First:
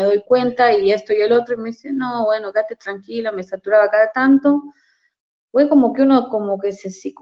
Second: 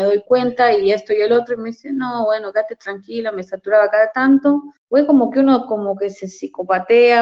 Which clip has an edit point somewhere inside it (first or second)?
second